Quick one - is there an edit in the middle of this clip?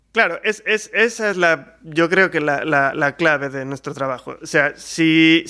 no; 0 cuts

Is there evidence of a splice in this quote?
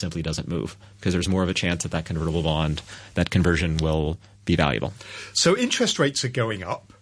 no; 0 cuts

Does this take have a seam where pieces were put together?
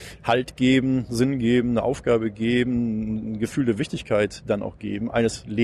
no; 0 cuts

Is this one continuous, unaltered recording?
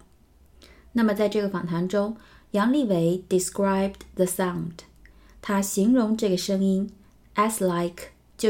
yes; 0 cuts

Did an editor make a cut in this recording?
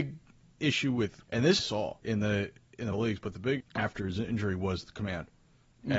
yes; 5 cuts; at 1.2 s, 1.6 s, 2.0 s, 2.9 s, 3.6 s

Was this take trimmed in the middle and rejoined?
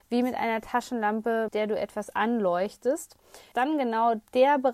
yes; 2 cuts; at 1.5 s, 3.5 s

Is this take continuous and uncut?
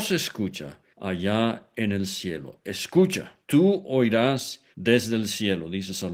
no; 3 cuts; at 0.9 s, 3.4 s, 4.7 s

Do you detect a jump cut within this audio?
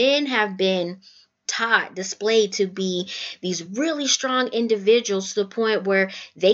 no; 0 cuts

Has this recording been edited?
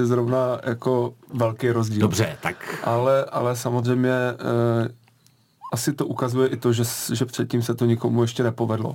no; 0 cuts

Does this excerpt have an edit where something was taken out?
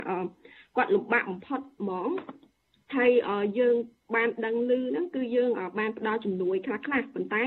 no; 0 cuts

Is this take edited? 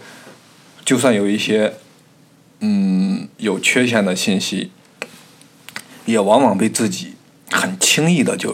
no; 0 cuts

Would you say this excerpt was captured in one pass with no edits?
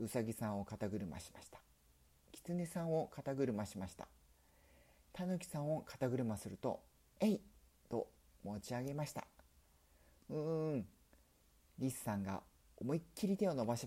yes; 0 cuts

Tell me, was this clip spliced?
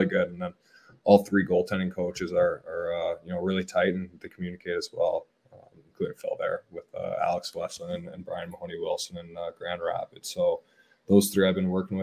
no; 0 cuts

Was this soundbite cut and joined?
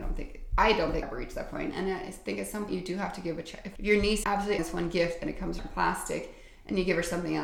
yes; 6 cuts; at 1.0 s, 2.7 s, 3.8 s, 4.2 s, 4.6 s, 5.6 s

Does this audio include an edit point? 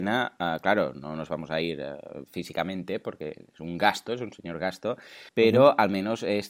yes; 1 cut; at 5.3 s

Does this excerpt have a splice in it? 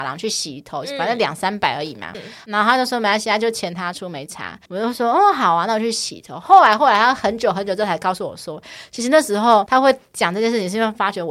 yes; 2 cuts; at 2.1 s, 4.7 s

